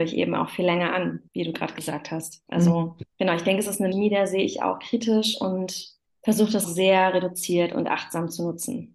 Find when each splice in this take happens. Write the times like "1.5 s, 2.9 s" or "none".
1.3 s, 3.1 s, 3.9 s, 6.0 s, 6.6 s